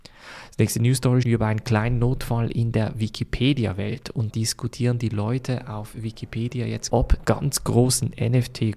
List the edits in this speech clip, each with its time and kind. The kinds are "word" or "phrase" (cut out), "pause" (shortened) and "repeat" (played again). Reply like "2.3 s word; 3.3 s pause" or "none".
1.2 s word; 4.3 s word; 6.9 s word; 7.2 s word